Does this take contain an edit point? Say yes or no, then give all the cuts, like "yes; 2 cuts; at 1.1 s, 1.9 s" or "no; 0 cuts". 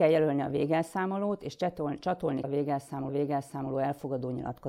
yes; 2 cuts; at 2.4 s, 3.1 s